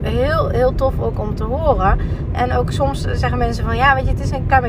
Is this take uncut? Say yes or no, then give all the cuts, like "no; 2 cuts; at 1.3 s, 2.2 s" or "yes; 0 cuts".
yes; 0 cuts